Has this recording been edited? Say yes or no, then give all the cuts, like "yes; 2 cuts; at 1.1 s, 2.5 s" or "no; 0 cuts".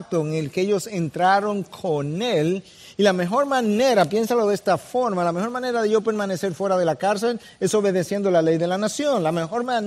no; 0 cuts